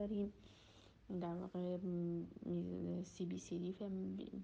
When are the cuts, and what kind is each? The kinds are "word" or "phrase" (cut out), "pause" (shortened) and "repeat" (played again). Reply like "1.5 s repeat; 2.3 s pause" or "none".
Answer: none